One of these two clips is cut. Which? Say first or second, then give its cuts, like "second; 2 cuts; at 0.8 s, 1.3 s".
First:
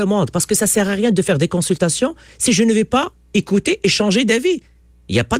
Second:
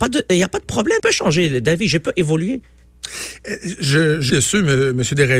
second; 2 cuts; at 1.0 s, 4.3 s